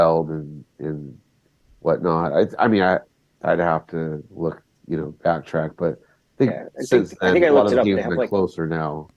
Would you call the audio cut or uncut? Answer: uncut